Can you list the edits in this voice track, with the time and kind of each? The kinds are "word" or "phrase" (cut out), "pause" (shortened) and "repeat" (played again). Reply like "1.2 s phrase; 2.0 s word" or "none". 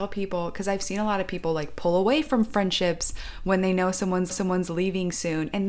4.3 s repeat

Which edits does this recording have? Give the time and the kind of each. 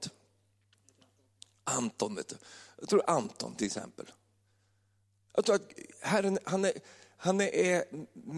none

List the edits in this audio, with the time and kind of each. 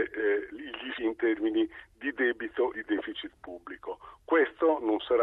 1.0 s word; 2.7 s word

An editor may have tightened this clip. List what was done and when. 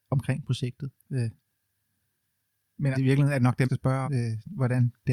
1.0 s pause; 2.9 s word; 3.6 s word; 4.0 s word

